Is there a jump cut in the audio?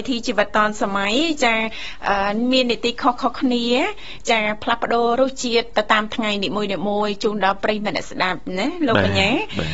no; 0 cuts

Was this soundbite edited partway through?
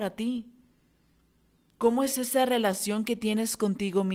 no; 0 cuts

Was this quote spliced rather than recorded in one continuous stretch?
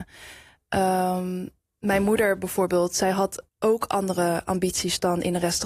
yes; 2 cuts; at 1.6 s, 3.5 s

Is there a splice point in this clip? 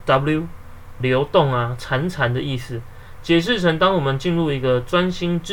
yes; 1 cut; at 1.0 s

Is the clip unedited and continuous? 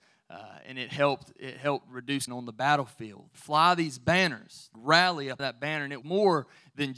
no; 5 cuts; at 2.3 s, 3.3 s, 4.7 s, 5.4 s, 6.0 s

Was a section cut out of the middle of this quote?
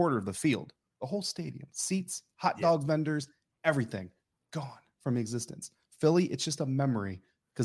no; 0 cuts

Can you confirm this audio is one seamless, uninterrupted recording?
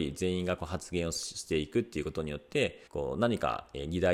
no; 1 cut; at 2.9 s

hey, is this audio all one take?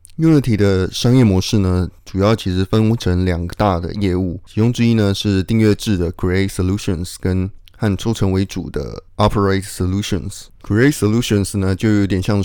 no; 1 cut; at 10.6 s

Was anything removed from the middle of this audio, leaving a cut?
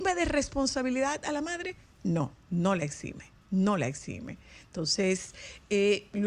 yes; 2 cuts; at 2.4 s, 3.4 s

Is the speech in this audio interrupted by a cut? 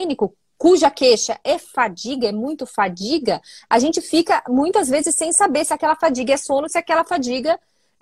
no; 0 cuts

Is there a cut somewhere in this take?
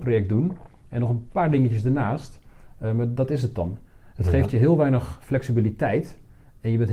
no; 0 cuts

